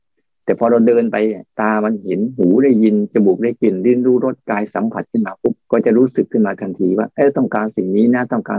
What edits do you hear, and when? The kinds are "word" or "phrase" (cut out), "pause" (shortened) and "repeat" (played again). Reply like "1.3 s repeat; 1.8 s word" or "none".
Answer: 1.5 s pause; 5.6 s pause